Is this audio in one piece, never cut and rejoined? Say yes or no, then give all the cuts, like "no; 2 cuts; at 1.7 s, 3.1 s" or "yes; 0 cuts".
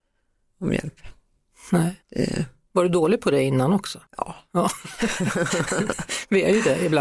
no; 2 cuts; at 2.0 s, 4.1 s